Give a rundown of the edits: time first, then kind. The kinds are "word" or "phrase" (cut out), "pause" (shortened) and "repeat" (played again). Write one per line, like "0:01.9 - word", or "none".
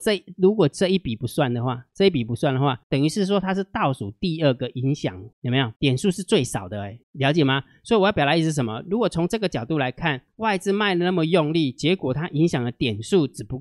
0:02.8 - pause
0:05.3 - pause
0:05.8 - pause
0:07.0 - pause
0:10.3 - pause